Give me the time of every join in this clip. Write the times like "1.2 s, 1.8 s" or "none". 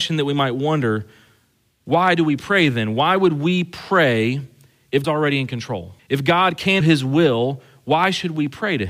5.0 s, 6.0 s, 6.8 s